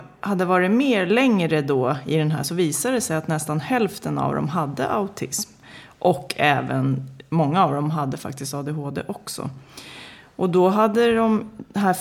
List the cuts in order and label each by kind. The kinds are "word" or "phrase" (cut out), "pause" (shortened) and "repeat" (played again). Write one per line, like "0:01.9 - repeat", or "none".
0:02.4 - word